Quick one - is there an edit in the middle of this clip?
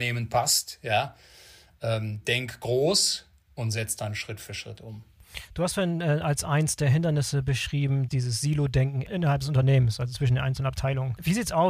yes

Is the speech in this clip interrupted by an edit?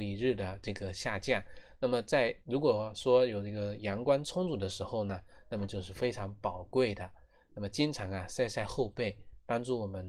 yes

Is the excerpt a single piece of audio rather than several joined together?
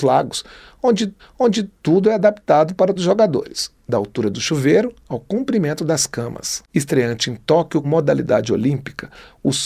no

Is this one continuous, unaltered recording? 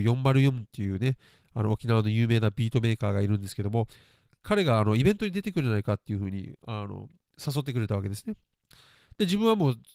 yes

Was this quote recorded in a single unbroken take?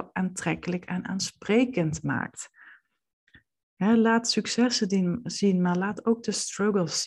yes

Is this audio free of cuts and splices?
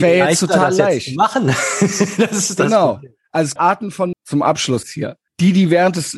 no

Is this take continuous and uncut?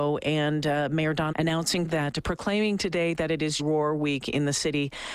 no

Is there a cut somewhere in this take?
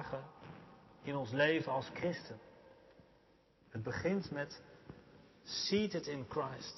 no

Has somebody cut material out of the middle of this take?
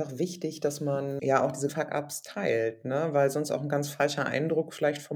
yes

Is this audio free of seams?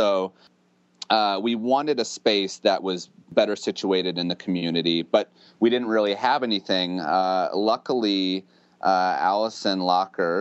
yes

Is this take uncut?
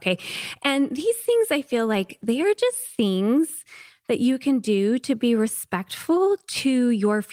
yes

